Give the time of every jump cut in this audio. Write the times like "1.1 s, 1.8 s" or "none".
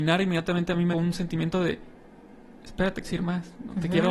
0.9 s, 3.0 s